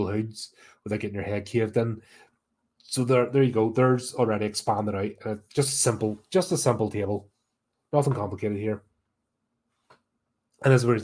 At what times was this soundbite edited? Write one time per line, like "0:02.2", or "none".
none